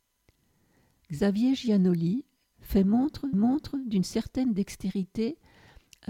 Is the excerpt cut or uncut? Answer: cut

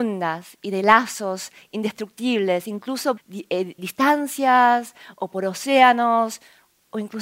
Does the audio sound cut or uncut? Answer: cut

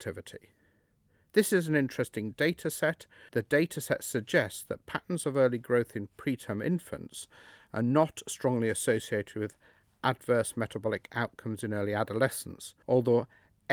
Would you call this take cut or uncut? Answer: cut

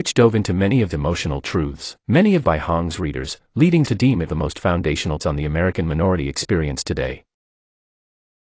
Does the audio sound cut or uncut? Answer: cut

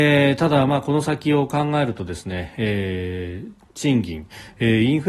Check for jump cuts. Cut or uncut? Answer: cut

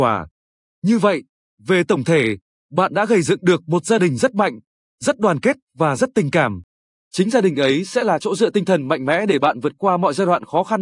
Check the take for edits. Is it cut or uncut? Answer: uncut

